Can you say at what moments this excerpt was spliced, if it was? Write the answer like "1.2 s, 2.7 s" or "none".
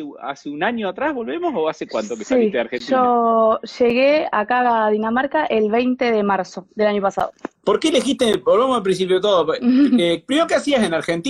none

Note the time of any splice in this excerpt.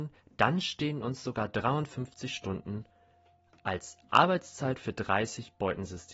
none

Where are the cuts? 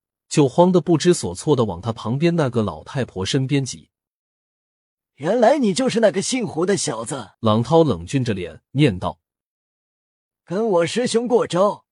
7.3 s, 8.6 s

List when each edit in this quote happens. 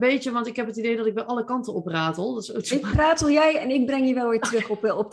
2.9 s

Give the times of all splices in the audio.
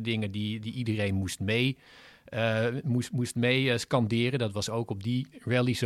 none

